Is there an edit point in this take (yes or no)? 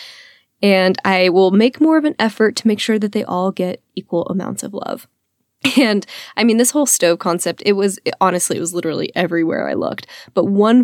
no